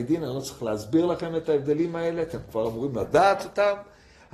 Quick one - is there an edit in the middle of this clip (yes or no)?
no